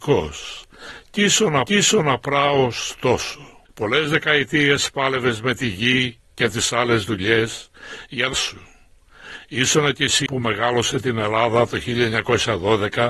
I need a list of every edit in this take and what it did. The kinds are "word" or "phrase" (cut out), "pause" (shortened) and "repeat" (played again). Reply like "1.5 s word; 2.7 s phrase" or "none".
1.7 s repeat; 3.7 s pause; 8.3 s phrase; 10.3 s phrase